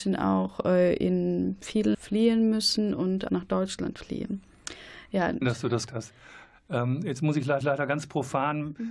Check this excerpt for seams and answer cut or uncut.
cut